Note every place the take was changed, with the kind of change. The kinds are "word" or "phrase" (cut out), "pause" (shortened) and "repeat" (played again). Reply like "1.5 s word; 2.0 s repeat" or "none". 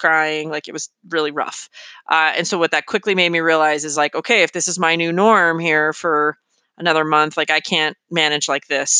none